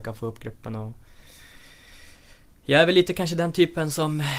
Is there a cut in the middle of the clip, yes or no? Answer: no